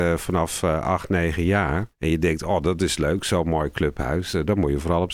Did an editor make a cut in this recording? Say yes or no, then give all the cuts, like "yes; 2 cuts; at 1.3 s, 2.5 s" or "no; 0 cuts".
yes; 1 cut; at 1.9 s